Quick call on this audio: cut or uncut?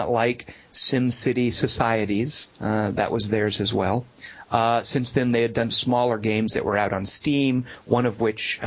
cut